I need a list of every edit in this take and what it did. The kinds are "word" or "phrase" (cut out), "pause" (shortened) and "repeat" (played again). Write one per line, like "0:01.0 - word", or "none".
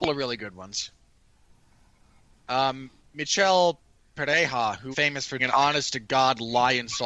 0:03.0 - pause
0:04.9 - phrase
0:05.4 - word